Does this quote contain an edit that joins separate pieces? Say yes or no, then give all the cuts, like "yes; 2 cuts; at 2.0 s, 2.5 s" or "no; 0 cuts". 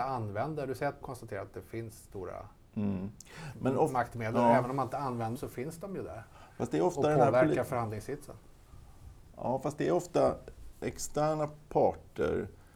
yes; 3 cuts; at 1.0 s, 5.4 s, 10.7 s